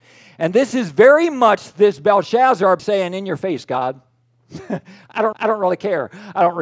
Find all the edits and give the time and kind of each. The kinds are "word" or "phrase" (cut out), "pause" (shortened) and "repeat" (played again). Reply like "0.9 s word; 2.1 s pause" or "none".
2.8 s word; 5.3 s repeat